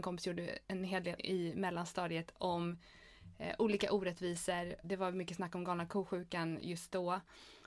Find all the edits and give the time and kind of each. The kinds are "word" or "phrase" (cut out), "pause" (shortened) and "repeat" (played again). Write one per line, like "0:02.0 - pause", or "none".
0:01.2 - word
0:04.8 - word